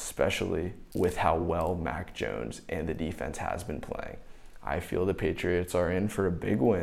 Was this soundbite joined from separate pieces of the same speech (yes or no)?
no